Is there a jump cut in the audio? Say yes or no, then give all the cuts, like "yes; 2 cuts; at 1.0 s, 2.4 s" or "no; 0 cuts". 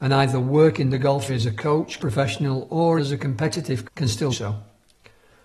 yes; 5 cuts; at 1.3 s, 2.0 s, 3.0 s, 3.8 s, 4.3 s